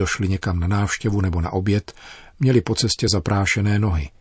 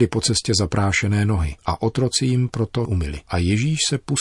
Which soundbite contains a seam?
second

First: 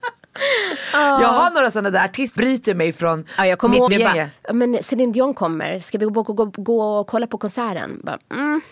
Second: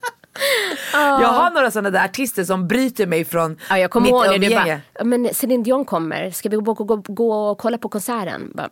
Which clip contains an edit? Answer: first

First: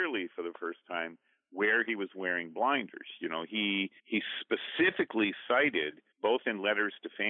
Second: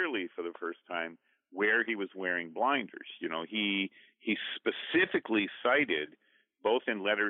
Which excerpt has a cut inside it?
first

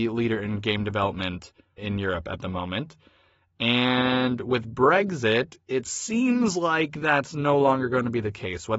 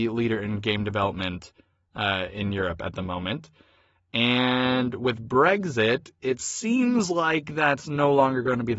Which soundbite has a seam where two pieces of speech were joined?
first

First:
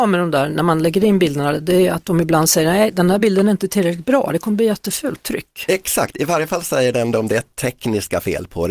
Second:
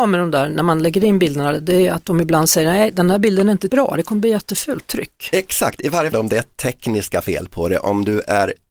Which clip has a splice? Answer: second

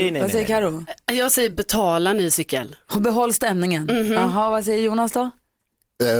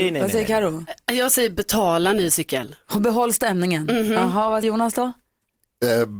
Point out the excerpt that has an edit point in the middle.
second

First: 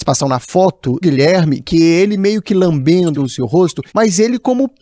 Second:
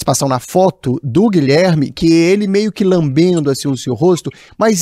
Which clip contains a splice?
first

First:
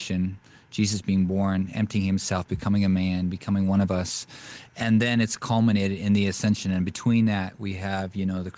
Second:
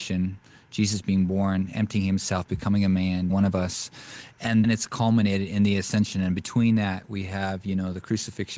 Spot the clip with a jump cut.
second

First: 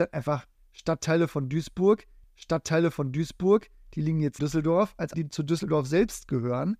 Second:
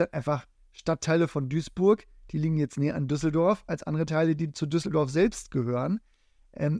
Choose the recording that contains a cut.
first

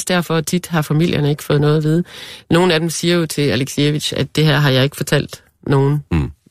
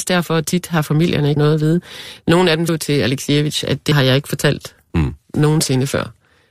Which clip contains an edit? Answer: second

